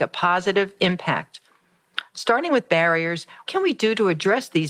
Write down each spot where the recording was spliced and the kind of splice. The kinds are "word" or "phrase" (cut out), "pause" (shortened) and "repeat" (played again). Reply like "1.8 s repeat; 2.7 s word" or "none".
3.5 s word